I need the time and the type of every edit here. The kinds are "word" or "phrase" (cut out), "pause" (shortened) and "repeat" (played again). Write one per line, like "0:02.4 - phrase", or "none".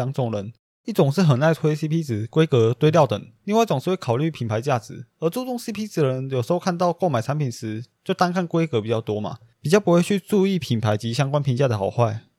0:05.1 - pause